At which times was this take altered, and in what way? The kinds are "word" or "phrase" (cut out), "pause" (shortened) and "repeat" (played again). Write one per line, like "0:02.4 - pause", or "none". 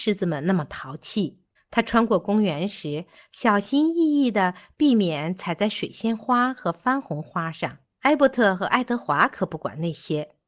0:01.6 - pause
0:07.8 - pause